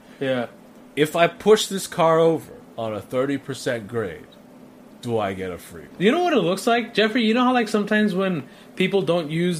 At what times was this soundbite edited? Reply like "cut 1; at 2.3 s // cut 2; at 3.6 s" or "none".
none